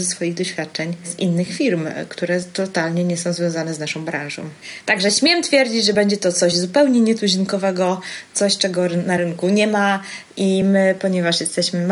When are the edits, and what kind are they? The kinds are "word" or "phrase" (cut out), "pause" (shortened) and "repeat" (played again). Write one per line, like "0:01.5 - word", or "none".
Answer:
none